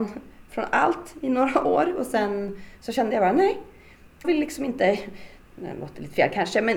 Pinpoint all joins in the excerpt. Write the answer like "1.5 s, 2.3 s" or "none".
4.2 s